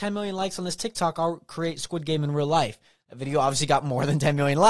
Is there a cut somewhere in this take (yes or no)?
no